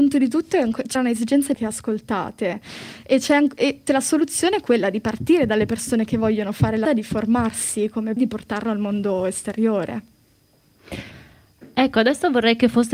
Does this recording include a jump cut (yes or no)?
yes